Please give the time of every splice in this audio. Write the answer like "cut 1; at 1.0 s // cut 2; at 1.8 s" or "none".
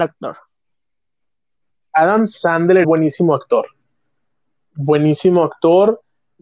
cut 1; at 2.8 s

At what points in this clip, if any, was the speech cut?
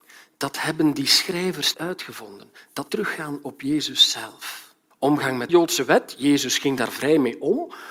cut 1; at 1.7 s // cut 2; at 2.9 s // cut 3; at 4.9 s // cut 4; at 5.5 s

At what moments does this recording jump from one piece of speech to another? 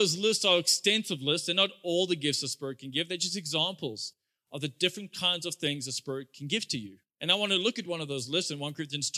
none

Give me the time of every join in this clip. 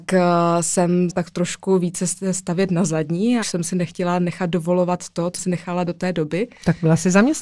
cut 1; at 1.1 s // cut 2; at 3.4 s // cut 3; at 5.4 s

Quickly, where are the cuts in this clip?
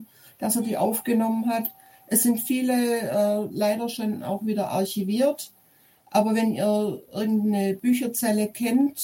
none

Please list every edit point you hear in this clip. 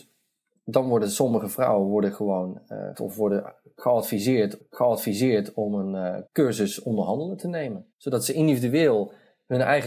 cut 1; at 2.9 s // cut 2; at 4.6 s // cut 3; at 6.3 s // cut 4; at 7.9 s

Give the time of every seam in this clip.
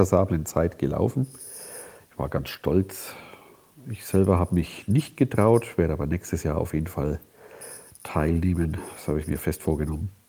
none

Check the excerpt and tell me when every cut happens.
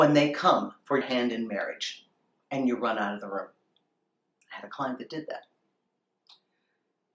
cut 1; at 1.0 s

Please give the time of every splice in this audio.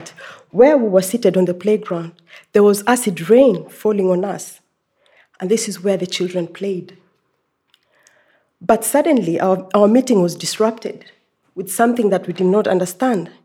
none

